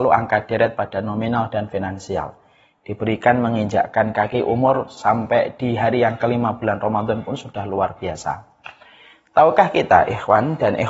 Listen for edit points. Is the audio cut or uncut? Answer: uncut